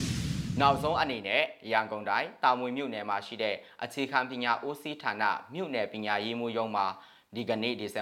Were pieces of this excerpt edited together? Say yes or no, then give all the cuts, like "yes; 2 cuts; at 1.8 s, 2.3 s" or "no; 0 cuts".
no; 0 cuts